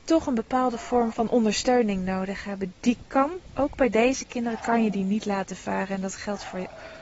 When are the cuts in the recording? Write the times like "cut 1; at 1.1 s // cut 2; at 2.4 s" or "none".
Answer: cut 1; at 1.1 s